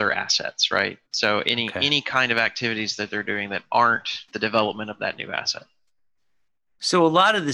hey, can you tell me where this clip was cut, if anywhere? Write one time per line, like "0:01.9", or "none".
0:01.1
0:04.3